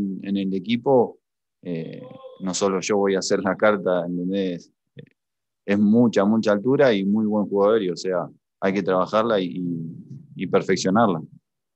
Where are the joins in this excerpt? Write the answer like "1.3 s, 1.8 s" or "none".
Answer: none